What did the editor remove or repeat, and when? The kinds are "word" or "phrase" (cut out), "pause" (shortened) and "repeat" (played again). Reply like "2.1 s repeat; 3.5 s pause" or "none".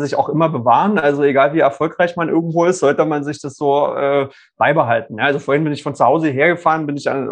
none